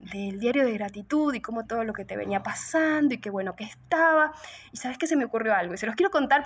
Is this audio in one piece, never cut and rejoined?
no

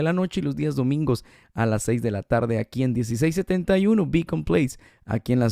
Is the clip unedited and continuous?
yes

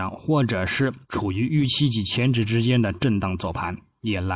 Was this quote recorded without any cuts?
no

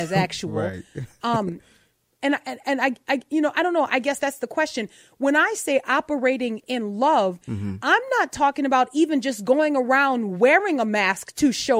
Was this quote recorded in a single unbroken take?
yes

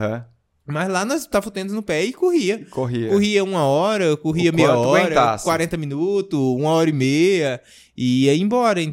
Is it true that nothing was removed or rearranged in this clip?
yes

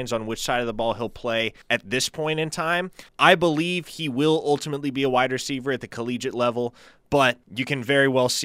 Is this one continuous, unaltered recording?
no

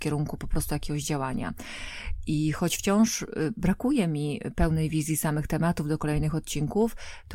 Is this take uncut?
yes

